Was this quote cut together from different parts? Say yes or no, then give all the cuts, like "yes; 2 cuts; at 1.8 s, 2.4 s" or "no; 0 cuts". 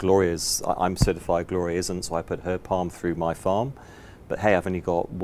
no; 0 cuts